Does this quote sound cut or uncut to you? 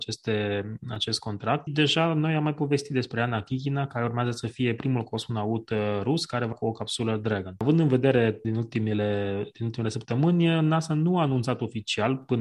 cut